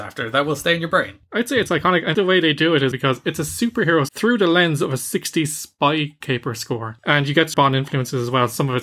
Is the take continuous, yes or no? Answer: no